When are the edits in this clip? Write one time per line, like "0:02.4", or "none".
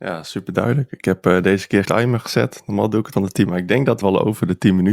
0:01.9
0:03.1
0:03.5
0:04.0